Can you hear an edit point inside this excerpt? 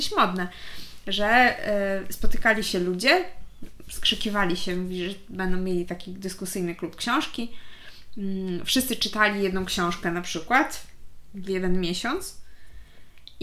no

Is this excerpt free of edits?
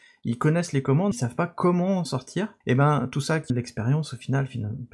no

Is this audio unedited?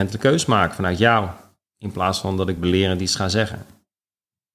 yes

